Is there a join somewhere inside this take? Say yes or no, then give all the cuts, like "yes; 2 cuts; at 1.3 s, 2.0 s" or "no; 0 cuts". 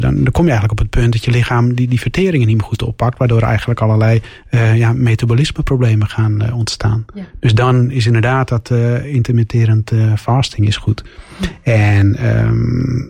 yes; 1 cut; at 7.3 s